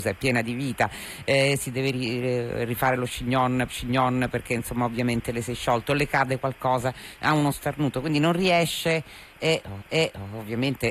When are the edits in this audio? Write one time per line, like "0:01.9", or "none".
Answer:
0:03.7
0:09.8